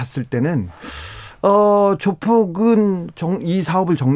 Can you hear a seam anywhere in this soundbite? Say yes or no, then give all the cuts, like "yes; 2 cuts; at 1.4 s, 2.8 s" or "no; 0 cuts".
no; 0 cuts